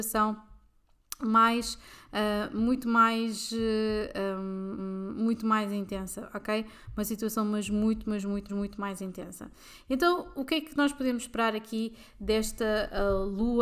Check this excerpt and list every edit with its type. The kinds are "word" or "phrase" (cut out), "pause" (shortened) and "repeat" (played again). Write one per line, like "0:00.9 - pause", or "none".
0:04.8 - repeat
0:08.5 - repeat